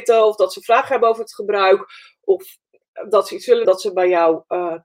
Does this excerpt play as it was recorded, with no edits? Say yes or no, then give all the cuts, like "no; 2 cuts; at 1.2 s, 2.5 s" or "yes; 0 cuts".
no; 1 cut; at 3.6 s